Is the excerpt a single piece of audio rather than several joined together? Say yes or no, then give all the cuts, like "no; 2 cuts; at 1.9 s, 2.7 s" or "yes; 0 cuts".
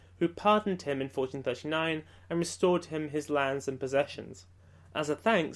yes; 0 cuts